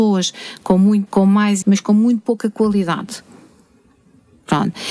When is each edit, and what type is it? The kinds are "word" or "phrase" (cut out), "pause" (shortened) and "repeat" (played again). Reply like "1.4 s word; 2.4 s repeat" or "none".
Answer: 1.1 s word; 1.6 s word